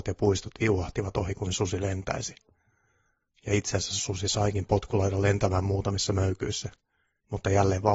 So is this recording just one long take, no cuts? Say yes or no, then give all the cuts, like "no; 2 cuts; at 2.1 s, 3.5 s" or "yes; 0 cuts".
yes; 0 cuts